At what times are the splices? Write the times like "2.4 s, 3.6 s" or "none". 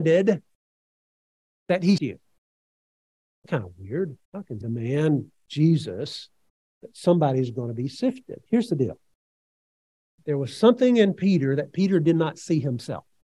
2.0 s, 3.5 s, 4.2 s, 4.6 s, 6.6 s, 8.5 s